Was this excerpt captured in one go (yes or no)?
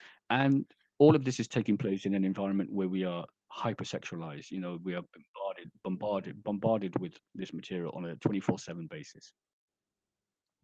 yes